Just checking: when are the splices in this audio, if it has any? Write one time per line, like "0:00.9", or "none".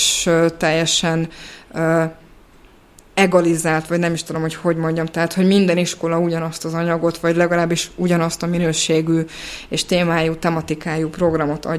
none

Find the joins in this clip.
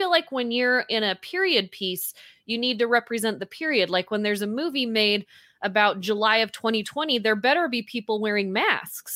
none

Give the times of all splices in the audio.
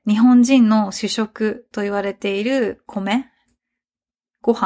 none

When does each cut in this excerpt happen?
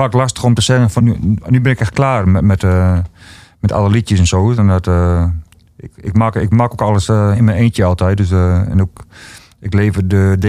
0:01.0

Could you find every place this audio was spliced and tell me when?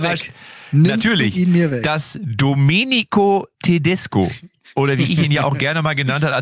0:03.5

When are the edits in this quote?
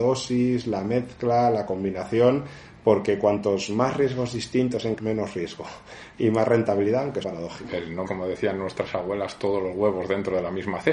0:05.0
0:07.2
0:08.0

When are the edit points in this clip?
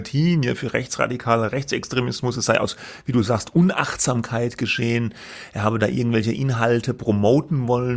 none

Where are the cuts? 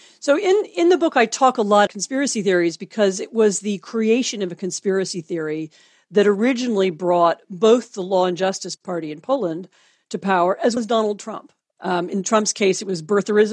0:01.9
0:10.8

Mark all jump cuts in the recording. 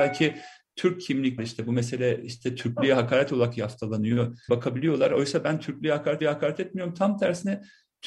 0:01.4
0:04.5
0:06.2

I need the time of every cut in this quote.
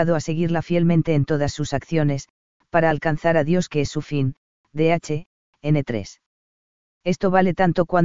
none

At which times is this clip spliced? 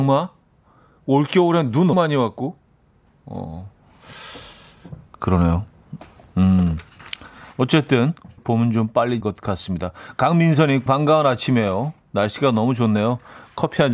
0:01.9
0:08.4
0:09.2
0:10.9

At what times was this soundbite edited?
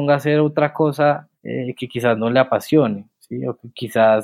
0:01.3

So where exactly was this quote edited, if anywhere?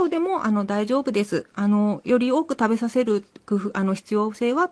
none

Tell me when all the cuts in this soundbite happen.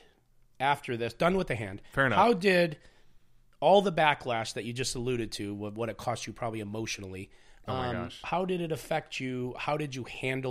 none

